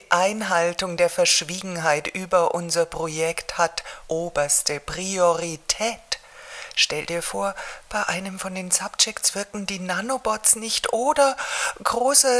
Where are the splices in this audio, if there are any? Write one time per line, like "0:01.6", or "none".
0:04.0